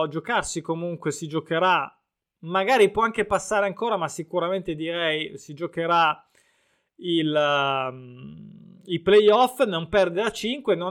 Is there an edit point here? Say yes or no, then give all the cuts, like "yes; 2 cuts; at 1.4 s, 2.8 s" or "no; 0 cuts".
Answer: no; 0 cuts